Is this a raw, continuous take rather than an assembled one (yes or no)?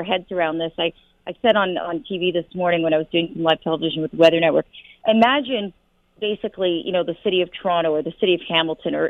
yes